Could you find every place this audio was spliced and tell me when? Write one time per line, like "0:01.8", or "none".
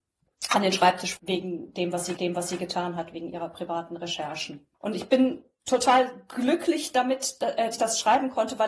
0:01.2
0:02.2
0:04.7
0:07.7